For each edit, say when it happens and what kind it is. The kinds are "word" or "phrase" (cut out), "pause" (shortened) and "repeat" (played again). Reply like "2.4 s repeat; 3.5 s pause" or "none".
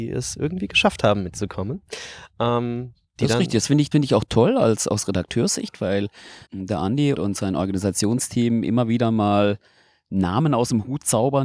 3.9 s word; 6.5 s word; 7.1 s word